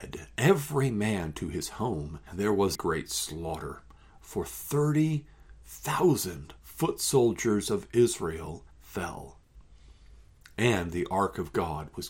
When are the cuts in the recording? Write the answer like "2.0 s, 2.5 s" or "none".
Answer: 2.3 s, 2.7 s, 6.6 s, 8.7 s